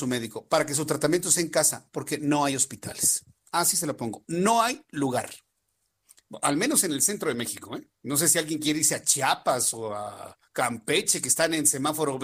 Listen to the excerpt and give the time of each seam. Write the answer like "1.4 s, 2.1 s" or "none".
8.0 s